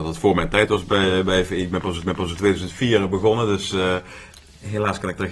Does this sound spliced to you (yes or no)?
yes